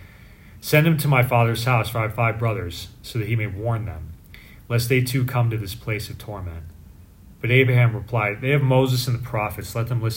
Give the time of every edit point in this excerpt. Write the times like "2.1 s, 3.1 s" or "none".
none